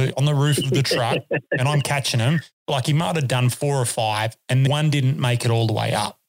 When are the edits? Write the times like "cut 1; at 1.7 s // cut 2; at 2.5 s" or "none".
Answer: cut 1; at 4.7 s